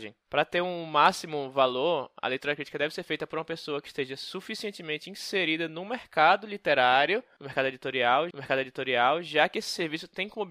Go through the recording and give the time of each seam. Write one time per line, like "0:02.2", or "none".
0:08.3